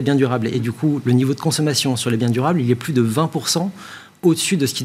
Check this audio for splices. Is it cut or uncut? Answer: uncut